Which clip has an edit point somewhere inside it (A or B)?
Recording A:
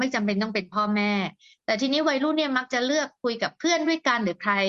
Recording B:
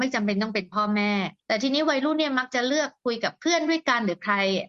B